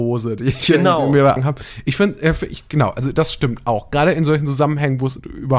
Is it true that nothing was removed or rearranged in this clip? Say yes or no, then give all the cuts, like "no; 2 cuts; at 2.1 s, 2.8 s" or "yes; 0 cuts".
no; 1 cut; at 1.4 s